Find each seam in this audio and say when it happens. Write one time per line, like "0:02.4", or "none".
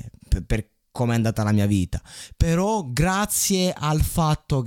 none